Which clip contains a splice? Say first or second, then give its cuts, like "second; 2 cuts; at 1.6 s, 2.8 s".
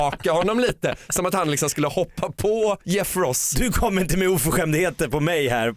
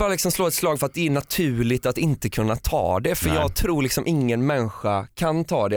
first; 1 cut; at 2.8 s